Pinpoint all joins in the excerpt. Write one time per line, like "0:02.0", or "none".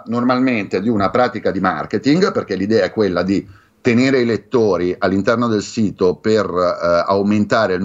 none